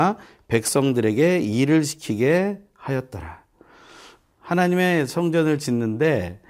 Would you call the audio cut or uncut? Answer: uncut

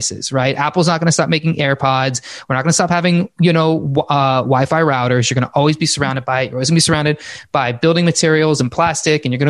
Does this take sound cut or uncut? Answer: uncut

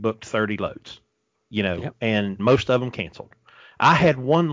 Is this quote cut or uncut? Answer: cut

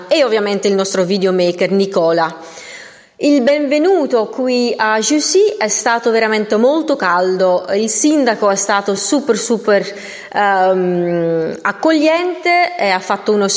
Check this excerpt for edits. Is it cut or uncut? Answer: uncut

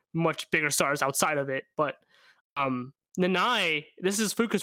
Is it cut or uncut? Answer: uncut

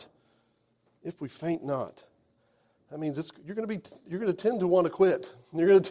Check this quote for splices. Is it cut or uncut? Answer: uncut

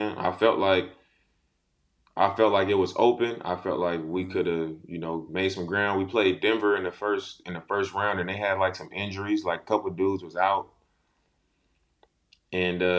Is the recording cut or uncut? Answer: uncut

